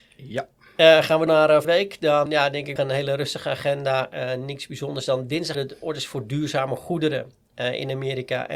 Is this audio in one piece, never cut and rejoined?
no; 5 cuts; at 1.3 s, 1.6 s, 2.3 s, 2.8 s, 5.5 s

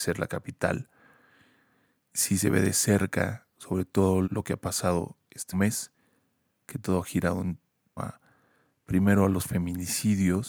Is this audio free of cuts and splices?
no; 4 cuts; at 2.1 s, 4.2 s, 5.5 s, 8.0 s

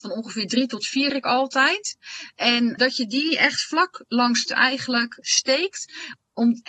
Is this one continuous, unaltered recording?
no; 4 cuts; at 1.1 s, 2.8 s, 4.4 s, 5.2 s

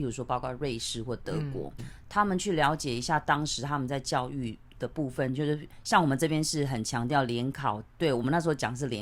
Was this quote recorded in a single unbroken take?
no; 1 cut; at 1.8 s

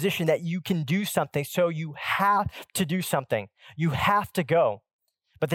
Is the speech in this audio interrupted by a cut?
no; 0 cuts

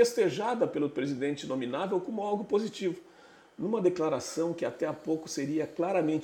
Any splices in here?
no; 0 cuts

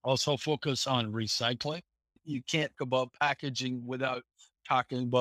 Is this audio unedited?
no; 1 cut; at 2.7 s

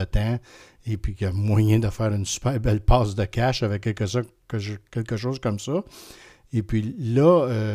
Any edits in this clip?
no; 0 cuts

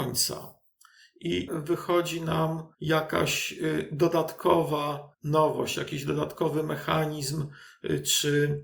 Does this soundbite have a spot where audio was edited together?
yes; 3 cuts; at 1.5 s, 2.7 s, 5.1 s

